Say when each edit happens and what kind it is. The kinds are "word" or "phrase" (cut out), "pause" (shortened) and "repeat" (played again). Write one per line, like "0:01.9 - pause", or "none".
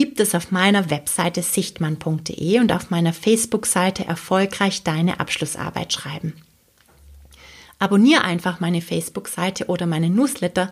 none